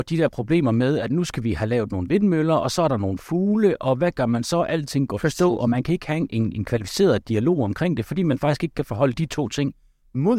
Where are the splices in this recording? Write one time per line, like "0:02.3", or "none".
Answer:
none